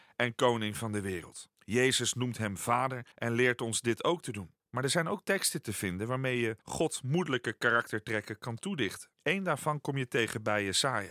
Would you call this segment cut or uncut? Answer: cut